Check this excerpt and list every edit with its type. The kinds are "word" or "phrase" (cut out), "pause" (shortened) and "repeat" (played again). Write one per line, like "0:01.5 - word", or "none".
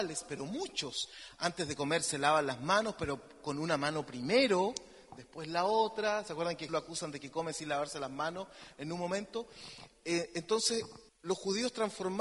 0:06.7 - word
0:11.1 - pause

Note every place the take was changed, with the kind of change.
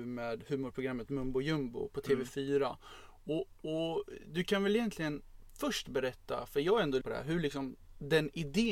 0:07.0 - phrase

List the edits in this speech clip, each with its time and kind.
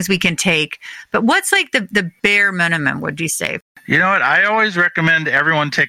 none

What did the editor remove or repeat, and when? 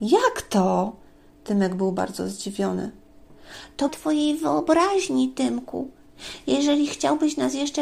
0:03.9 - phrase

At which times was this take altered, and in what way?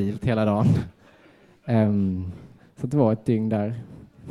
0:02.6 - pause

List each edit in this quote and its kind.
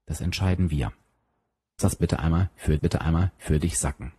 0:01.8 - word
0:02.8 - repeat

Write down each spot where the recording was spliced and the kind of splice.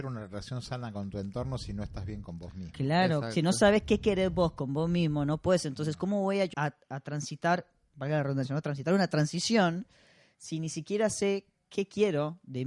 0:06.5 - word

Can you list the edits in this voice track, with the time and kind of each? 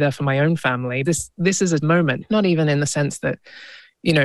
0:01.0 - word
0:01.8 - word
0:02.2 - word

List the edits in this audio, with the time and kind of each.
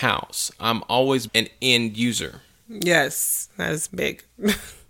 0:01.3 - word
0:03.9 - word

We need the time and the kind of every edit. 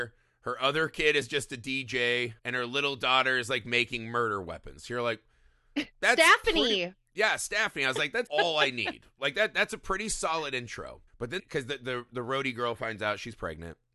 0:02.4 - pause
0:08.3 - word
0:11.1 - pause
0:11.4 - phrase

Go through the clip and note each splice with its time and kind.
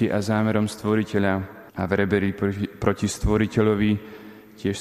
0:01.7 - pause

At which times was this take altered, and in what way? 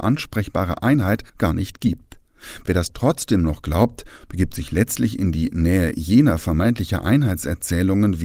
0:01.3 - pause

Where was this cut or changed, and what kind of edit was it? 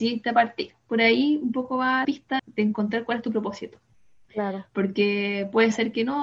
0:02.0 - word
0:02.4 - word

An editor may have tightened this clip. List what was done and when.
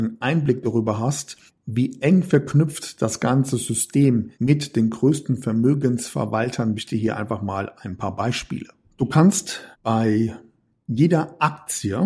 0:01.5 - pause
0:04.3 - pause
0:06.7 - phrase
0:08.8 - pause
0:09.7 - pause

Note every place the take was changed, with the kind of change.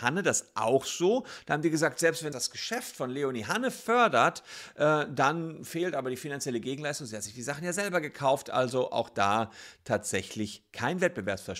0:02.3 - word

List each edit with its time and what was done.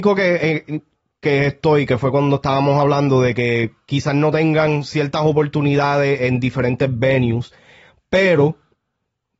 none

